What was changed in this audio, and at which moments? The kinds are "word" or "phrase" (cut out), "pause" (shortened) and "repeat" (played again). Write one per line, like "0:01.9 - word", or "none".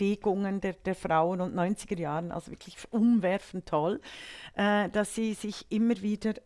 none